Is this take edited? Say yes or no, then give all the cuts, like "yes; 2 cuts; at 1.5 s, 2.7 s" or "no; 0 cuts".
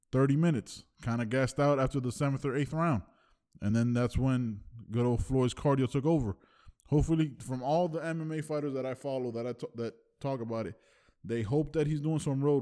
no; 0 cuts